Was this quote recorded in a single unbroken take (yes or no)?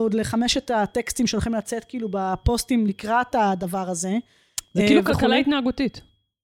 yes